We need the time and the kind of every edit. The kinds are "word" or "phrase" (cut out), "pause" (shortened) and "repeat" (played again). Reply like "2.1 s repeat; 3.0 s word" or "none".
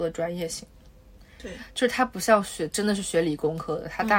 none